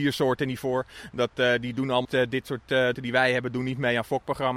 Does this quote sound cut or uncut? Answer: cut